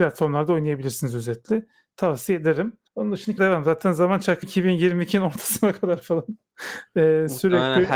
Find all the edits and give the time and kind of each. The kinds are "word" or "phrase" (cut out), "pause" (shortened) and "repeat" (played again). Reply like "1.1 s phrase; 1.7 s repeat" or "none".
2.9 s pause; 3.4 s phrase; 4.4 s phrase